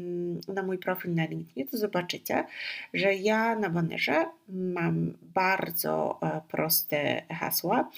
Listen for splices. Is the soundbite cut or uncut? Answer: uncut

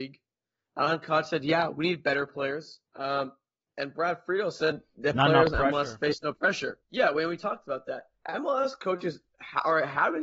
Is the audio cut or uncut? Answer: cut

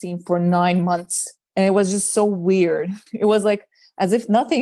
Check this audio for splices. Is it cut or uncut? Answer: cut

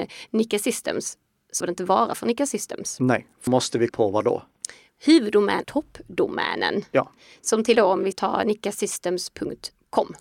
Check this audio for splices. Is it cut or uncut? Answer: cut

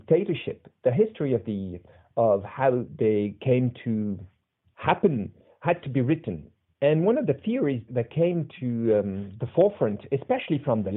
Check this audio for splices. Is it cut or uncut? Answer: uncut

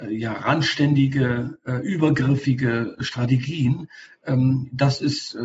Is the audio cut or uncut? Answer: uncut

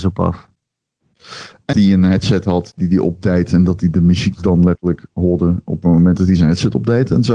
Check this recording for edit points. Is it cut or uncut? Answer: cut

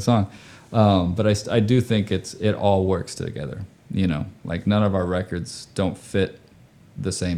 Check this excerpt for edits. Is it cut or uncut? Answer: uncut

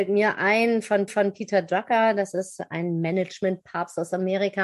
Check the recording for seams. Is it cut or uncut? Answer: cut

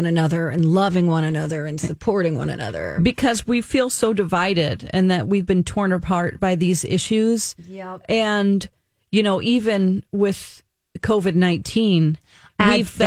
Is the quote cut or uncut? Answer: uncut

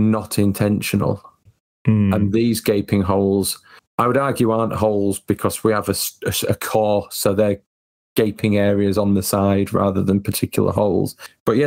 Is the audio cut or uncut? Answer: uncut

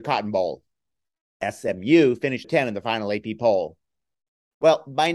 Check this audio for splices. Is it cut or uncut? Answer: cut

